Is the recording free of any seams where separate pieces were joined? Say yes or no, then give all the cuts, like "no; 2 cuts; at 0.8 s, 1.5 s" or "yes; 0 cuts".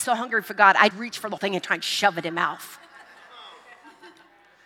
no; 3 cuts; at 0.9 s, 1.4 s, 2.3 s